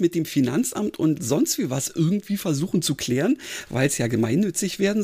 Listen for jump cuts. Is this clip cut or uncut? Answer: uncut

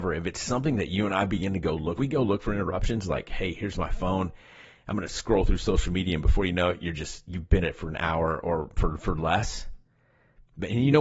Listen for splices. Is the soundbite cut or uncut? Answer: cut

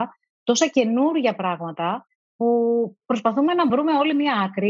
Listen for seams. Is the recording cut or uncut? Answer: uncut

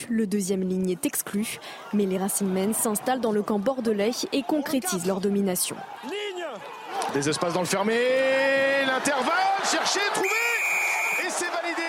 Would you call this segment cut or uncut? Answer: uncut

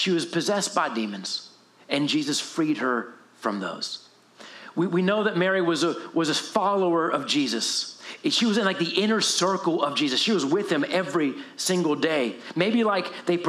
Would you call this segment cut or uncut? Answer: uncut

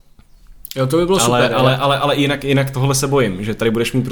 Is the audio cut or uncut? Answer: uncut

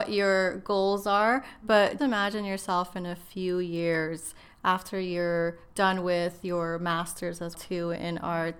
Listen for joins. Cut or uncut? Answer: cut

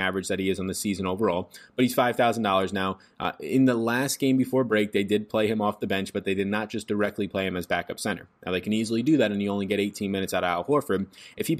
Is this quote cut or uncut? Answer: uncut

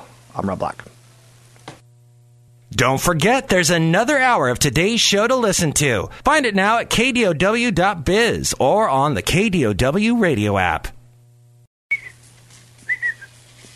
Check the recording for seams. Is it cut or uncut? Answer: uncut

